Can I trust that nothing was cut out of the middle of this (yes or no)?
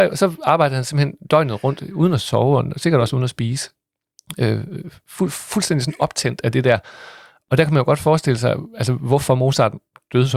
yes